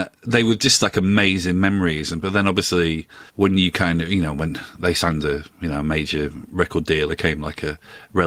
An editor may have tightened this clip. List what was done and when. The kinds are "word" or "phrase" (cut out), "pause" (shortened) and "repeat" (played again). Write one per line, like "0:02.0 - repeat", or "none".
0:03.3 - pause
0:07.1 - word